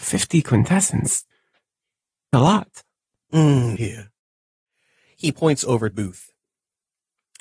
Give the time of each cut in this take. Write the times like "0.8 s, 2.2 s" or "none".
2.3 s, 3.8 s, 5.9 s